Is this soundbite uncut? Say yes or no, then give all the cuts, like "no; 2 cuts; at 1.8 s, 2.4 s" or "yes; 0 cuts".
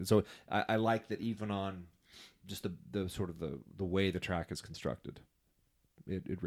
yes; 0 cuts